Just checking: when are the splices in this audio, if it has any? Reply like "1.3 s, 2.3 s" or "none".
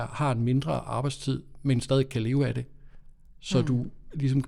none